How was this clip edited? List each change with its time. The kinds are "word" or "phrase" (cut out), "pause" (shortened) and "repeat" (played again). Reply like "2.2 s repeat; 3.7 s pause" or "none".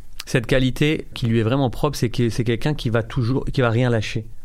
1.1 s word